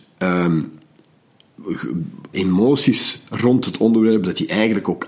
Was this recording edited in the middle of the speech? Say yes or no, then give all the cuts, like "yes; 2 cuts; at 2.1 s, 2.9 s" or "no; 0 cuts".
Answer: yes; 1 cut; at 2.3 s